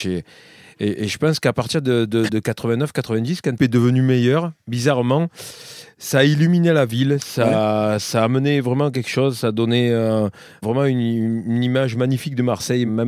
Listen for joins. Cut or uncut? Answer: cut